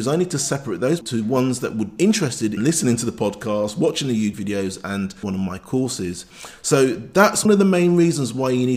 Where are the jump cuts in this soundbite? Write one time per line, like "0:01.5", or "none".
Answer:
0:01.0
0:02.0
0:02.6
0:04.3
0:05.2
0:07.4